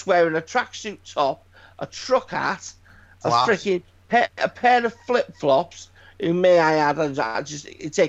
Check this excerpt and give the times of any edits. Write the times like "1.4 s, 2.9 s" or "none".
none